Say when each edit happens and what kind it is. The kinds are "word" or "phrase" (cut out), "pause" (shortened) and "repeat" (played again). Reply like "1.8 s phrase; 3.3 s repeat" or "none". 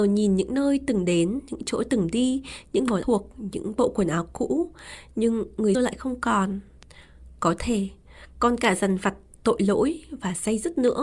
3.0 s phrase; 5.7 s word